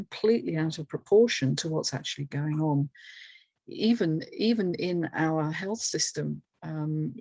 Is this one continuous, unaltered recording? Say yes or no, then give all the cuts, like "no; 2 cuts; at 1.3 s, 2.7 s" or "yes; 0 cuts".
yes; 0 cuts